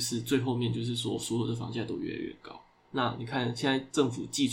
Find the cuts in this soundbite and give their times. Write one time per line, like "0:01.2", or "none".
none